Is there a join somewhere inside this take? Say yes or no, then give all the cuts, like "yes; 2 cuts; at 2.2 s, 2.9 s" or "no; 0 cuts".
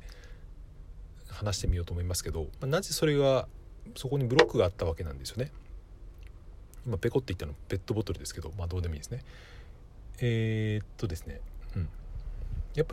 yes; 1 cut; at 2.5 s